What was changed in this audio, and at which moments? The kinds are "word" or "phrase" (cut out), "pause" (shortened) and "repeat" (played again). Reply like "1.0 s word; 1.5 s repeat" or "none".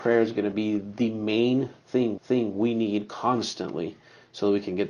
2.2 s repeat